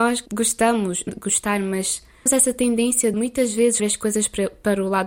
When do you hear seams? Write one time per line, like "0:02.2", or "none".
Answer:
0:01.1
0:02.3
0:03.1
0:03.8